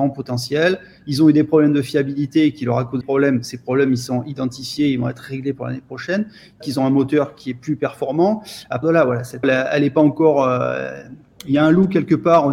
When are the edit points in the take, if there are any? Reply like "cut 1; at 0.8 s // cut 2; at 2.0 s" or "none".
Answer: cut 1; at 3.0 s // cut 2; at 6.6 s // cut 3; at 8.8 s // cut 4; at 9.4 s

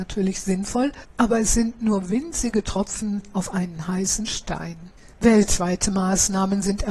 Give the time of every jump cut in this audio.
none

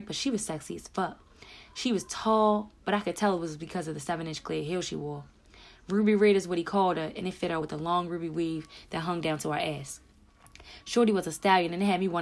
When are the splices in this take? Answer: cut 1; at 7.6 s

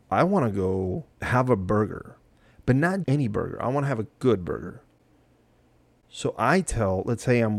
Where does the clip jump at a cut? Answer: cut 1; at 1.1 s // cut 2; at 3.0 s

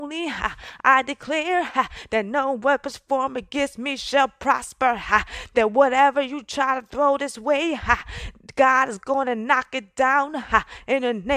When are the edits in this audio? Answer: none

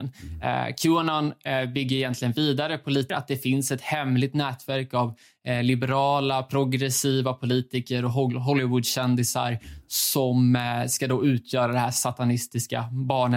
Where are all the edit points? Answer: cut 1; at 3.1 s

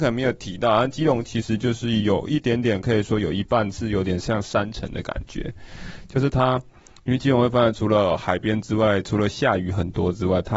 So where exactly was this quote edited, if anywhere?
none

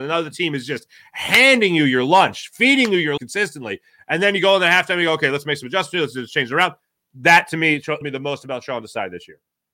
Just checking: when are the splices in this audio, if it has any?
cut 1; at 3.2 s // cut 2; at 8.0 s

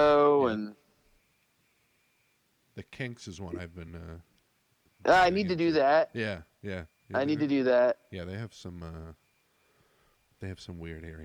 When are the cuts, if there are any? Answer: none

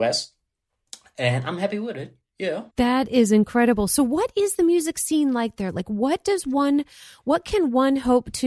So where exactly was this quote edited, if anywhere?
cut 1; at 2.7 s

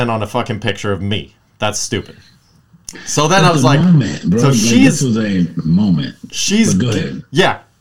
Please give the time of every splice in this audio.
none

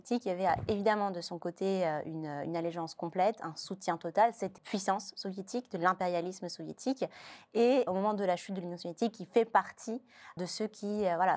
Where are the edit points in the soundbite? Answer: cut 1; at 4.6 s // cut 2; at 7.9 s // cut 3; at 10.4 s

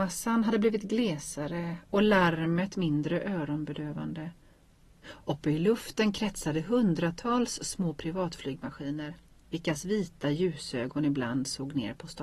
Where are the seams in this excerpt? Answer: none

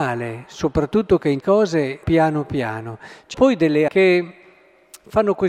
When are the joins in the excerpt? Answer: cut 1; at 1.4 s // cut 2; at 2.0 s // cut 3; at 3.3 s // cut 4; at 3.9 s

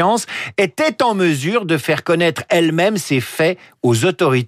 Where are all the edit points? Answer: none

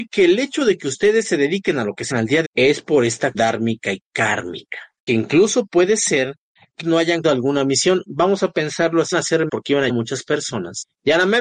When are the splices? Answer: cut 1; at 2.1 s // cut 2; at 2.4 s // cut 3; at 3.3 s // cut 4; at 5.1 s // cut 5; at 6.8 s // cut 6; at 7.2 s // cut 7; at 9.1 s // cut 8; at 9.5 s // cut 9; at 9.9 s

